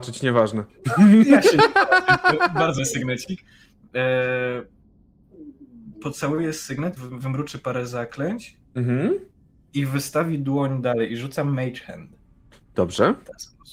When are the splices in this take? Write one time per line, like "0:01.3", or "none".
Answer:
0:02.8
0:07.0